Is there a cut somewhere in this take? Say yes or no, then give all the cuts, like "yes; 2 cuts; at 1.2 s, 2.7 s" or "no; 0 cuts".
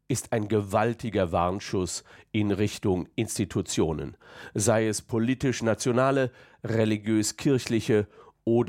no; 0 cuts